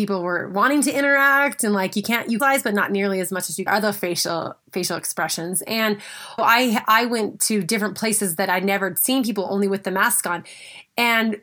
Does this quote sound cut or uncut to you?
cut